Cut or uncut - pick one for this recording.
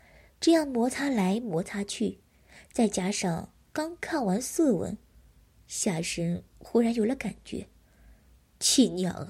uncut